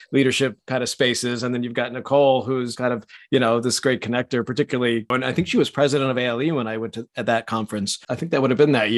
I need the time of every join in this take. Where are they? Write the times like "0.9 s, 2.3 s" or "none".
2.8 s